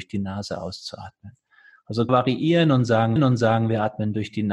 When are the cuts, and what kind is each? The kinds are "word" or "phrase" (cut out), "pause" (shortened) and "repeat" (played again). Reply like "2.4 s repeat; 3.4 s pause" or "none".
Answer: 2.1 s phrase; 3.2 s repeat